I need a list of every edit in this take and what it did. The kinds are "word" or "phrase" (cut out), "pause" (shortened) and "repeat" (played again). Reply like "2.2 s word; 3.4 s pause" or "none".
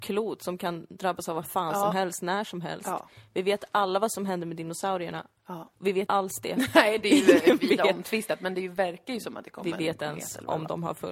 6.1 s word; 10.0 s word